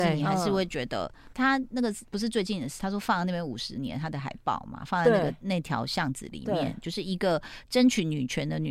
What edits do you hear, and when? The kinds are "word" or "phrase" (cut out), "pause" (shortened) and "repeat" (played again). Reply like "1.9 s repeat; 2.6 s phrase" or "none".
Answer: 1.3 s phrase; 2.1 s pause; 2.8 s phrase